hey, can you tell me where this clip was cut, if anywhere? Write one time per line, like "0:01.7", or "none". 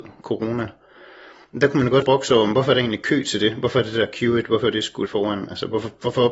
0:02.0
0:05.1

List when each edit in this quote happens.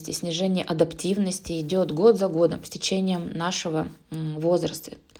none

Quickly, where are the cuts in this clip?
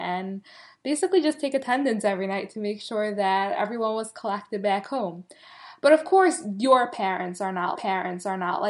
0:07.7

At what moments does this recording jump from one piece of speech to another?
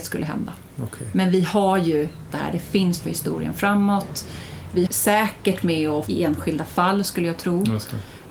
0:02.3
0:03.0
0:04.9
0:05.6
0:06.1

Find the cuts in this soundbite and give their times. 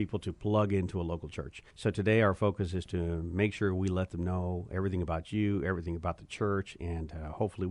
0:01.7

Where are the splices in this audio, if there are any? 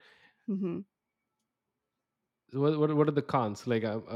none

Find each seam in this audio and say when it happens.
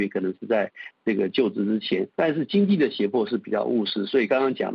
0:02.1

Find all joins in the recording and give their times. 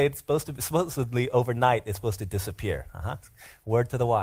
none

